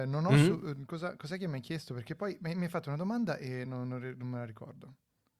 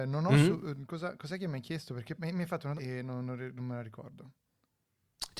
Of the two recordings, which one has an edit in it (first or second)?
second